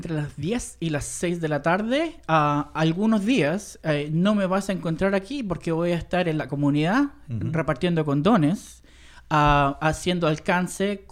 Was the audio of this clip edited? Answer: no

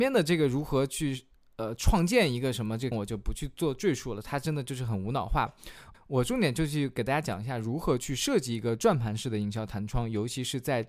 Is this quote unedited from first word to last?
no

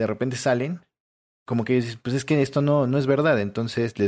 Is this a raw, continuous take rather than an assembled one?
yes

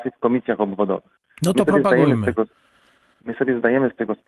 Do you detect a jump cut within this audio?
no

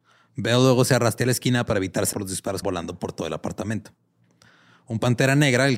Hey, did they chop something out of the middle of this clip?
yes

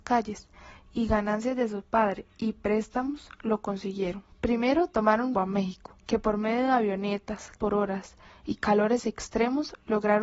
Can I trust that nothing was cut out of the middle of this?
no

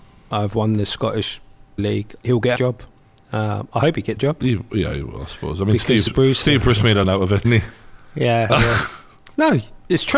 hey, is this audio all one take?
no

